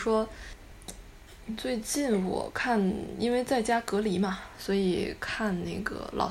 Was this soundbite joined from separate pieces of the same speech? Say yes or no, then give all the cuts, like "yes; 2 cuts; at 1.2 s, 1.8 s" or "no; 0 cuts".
no; 0 cuts